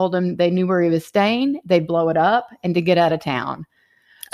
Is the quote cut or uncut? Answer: uncut